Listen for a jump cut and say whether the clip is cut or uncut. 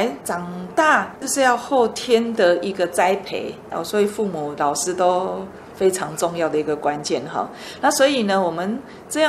uncut